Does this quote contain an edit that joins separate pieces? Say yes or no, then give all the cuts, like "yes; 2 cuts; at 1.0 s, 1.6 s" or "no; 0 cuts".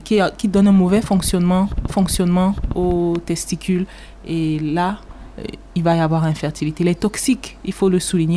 yes; 2 cuts; at 1.9 s, 5.7 s